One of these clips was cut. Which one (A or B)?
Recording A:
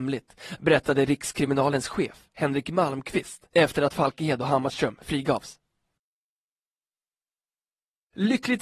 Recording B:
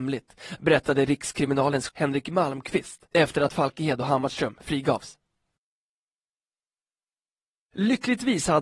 B